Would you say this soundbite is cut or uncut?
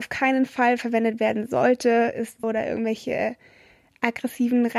cut